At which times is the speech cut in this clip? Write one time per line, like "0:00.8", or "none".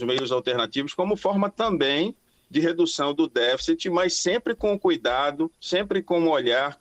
0:05.6